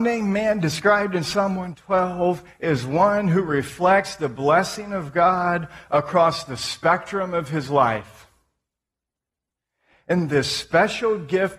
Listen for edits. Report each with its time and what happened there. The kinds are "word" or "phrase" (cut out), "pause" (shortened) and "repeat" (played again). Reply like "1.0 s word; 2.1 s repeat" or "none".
none